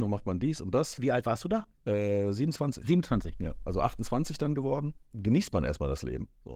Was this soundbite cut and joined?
yes; 2 cuts; at 1.7 s, 5.1 s

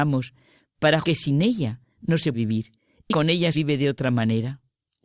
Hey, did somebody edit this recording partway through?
yes; 4 cuts; at 1.0 s, 2.3 s, 3.1 s, 3.5 s

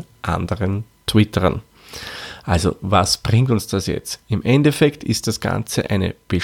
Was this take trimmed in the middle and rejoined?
no; 0 cuts

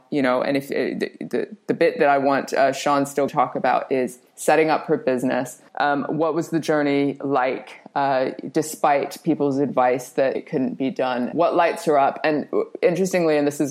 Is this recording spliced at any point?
yes; 5 cuts; at 3.3 s, 4.3 s, 5.7 s, 10.3 s, 11.3 s

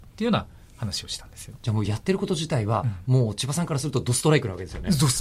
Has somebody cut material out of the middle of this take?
yes; 1 cut; at 1.5 s

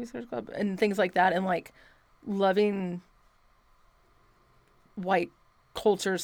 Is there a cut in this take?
no; 0 cuts

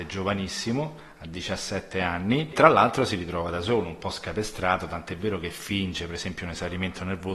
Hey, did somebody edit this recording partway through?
yes; 1 cut; at 2.5 s

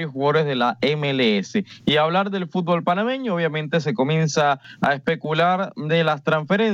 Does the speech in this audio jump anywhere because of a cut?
no; 0 cuts

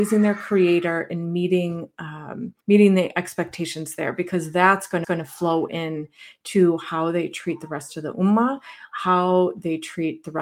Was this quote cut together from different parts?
yes; 2 cuts; at 2.6 s, 5.0 s

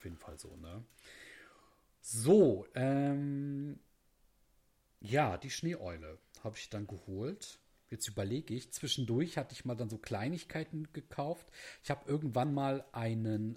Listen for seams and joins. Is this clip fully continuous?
yes; 0 cuts

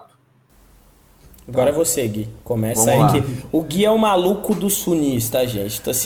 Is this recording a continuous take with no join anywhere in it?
no; 1 cut; at 2.4 s

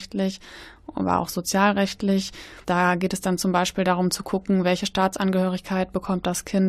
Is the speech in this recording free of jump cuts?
no; 1 cut; at 2.6 s

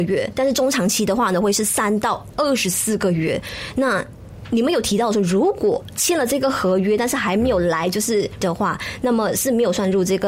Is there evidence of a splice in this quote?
yes; 1 cut; at 8.4 s

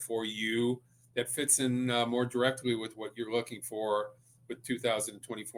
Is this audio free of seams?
yes; 0 cuts

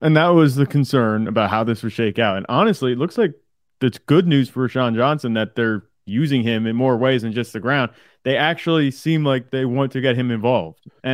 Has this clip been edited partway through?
no; 0 cuts

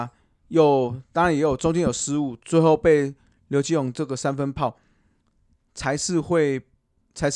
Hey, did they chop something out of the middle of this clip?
no; 0 cuts

